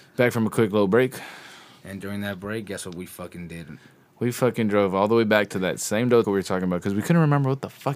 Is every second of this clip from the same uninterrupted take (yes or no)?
no